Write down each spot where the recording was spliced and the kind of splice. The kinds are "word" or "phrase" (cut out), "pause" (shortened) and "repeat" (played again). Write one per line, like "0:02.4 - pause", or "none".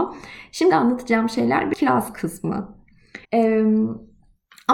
0:01.7 - word
0:03.2 - pause